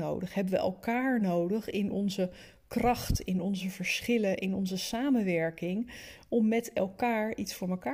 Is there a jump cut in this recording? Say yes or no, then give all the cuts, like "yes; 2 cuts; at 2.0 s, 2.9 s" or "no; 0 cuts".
no; 0 cuts